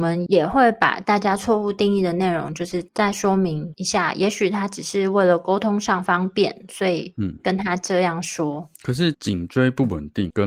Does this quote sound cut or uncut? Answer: cut